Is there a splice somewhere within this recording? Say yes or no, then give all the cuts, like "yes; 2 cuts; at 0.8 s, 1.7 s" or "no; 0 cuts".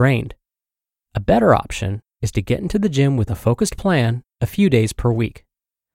no; 0 cuts